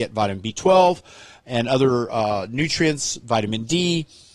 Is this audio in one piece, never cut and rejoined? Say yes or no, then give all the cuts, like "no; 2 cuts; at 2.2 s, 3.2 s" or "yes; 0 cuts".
yes; 0 cuts